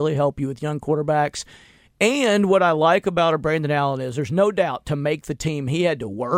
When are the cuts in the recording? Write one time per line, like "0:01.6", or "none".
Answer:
none